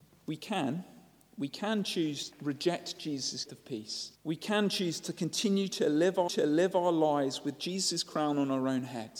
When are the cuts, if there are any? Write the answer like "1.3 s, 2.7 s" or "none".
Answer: 2.3 s, 3.4 s, 4.2 s, 6.3 s